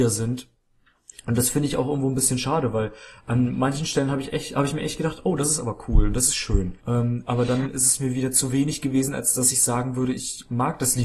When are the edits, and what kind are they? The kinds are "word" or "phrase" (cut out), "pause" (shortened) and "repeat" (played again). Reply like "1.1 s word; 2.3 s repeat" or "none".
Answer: 6.8 s pause